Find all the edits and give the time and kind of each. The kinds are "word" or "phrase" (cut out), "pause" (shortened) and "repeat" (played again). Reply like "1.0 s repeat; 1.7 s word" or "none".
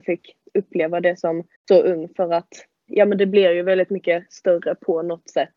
1.5 s pause; 2.9 s word